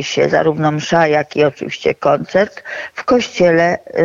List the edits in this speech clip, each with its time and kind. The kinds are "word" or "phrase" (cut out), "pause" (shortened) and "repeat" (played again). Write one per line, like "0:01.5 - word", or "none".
none